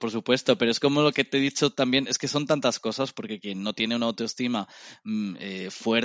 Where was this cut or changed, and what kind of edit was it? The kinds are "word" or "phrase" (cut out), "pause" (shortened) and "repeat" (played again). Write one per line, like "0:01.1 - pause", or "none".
none

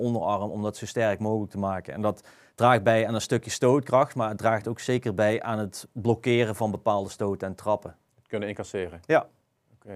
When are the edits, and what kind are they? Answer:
none

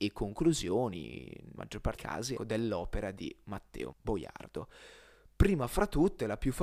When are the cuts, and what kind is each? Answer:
0:01.6 - word
0:02.0 - word
0:02.4 - word
0:03.9 - word

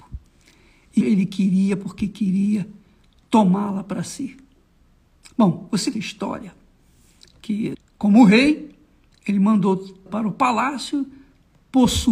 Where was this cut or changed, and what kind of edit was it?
0:01.0 - word
0:05.9 - word
0:07.7 - word
0:10.1 - word

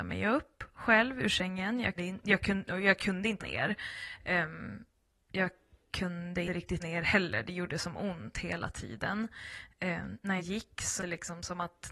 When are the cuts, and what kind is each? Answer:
0:02.0 - word
0:03.4 - word
0:06.5 - word
0:06.8 - word
0:10.4 - word
0:11.0 - word

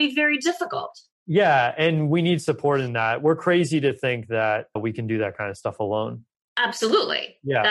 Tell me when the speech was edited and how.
none

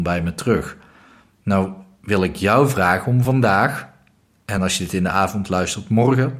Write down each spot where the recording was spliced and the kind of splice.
none

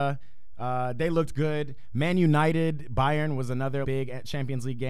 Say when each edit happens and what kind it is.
0:03.8 - word

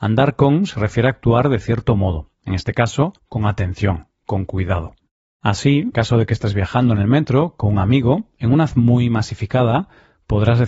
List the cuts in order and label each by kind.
0:03.2 - pause
0:05.9 - word
0:08.7 - word

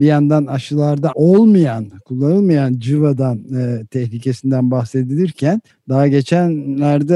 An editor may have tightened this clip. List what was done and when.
0:01.1 - word
0:05.7 - pause

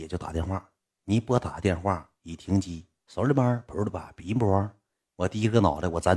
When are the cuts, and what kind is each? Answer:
0:04.9 - pause

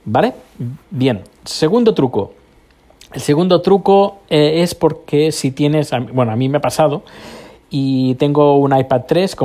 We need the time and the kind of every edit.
none

